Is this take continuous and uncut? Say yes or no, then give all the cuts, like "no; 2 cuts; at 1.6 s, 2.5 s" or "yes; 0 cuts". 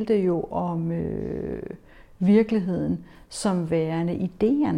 yes; 0 cuts